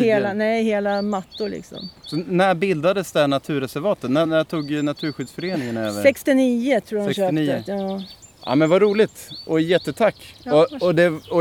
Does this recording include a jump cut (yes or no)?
yes